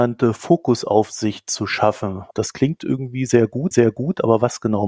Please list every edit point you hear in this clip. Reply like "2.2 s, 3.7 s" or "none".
3.7 s